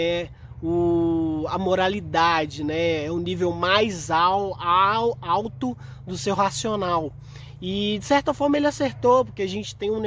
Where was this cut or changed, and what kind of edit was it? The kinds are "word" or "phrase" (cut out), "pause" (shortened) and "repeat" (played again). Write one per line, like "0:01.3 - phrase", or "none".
none